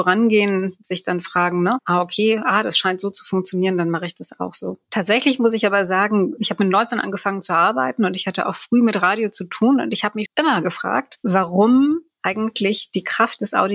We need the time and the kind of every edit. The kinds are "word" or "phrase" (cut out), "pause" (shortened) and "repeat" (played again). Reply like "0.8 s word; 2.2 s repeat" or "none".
10.3 s word